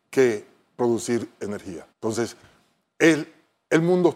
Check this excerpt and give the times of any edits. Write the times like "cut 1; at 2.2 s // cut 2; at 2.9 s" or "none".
cut 1; at 1.9 s